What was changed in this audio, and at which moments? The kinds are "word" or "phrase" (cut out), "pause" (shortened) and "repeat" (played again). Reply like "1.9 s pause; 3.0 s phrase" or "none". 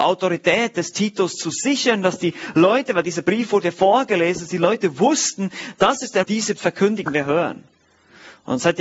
6.2 s phrase; 6.6 s word; 7.1 s phrase